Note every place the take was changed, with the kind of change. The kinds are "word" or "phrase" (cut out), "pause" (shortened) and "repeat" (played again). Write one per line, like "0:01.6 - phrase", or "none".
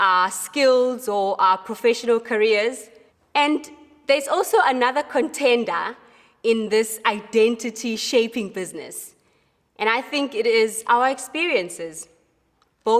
0:03.1 - pause